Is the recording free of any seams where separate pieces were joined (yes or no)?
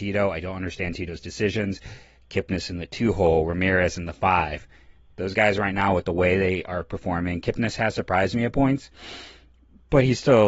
yes